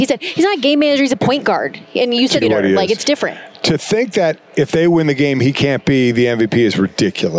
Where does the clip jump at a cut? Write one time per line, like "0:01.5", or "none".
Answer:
0:02.4